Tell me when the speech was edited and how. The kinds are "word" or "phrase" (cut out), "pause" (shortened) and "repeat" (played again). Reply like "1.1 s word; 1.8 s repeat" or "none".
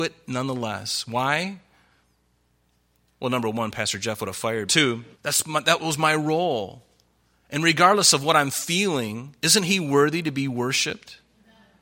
4.7 s phrase; 5.1 s pause; 9.4 s pause